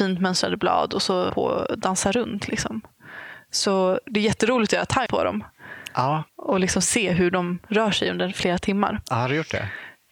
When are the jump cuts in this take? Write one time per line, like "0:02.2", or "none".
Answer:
0:01.3
0:05.1
0:06.3